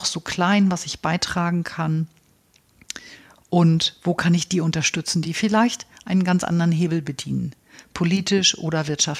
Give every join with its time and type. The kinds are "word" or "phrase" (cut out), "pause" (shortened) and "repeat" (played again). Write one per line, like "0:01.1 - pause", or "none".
none